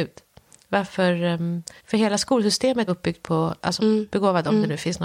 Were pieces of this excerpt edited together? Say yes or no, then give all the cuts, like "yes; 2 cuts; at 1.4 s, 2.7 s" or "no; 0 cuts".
yes; 3 cuts; at 1.8 s, 2.9 s, 3.8 s